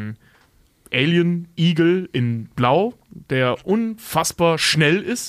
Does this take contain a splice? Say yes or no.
no